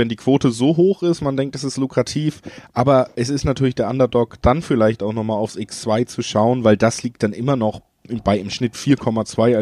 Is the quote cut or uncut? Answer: uncut